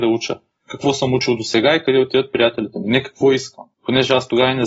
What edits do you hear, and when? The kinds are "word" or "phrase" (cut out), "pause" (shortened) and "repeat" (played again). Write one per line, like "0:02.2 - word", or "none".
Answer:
0:03.7 - pause